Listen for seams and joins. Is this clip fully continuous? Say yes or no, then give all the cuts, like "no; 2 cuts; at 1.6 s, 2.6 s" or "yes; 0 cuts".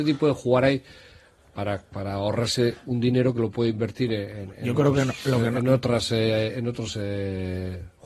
yes; 0 cuts